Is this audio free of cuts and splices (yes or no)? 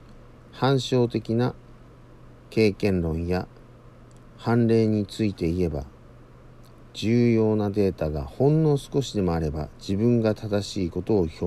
no